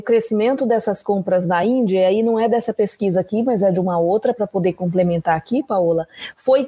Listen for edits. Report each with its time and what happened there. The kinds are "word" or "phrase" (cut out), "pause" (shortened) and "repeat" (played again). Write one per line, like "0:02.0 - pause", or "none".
none